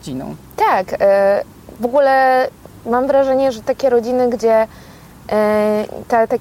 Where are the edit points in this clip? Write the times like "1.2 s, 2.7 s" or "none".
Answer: none